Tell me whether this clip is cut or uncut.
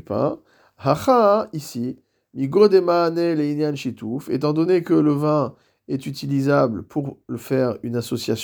uncut